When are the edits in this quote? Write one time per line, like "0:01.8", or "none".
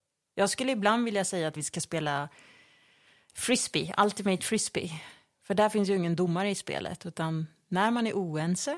0:01.6